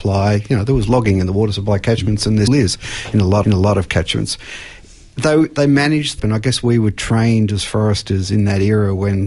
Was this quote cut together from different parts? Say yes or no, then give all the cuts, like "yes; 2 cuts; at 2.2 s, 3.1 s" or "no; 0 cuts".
yes; 3 cuts; at 2.5 s, 3.4 s, 6.2 s